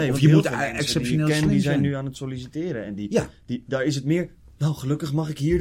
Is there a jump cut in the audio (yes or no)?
no